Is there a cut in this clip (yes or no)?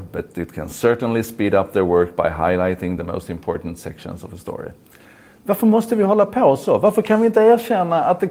no